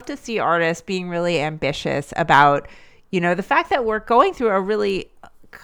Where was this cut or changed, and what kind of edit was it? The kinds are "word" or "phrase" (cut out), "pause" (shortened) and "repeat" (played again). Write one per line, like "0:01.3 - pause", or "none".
none